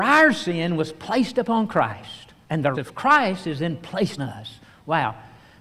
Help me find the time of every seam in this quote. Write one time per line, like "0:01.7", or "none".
0:02.4
0:02.7
0:04.2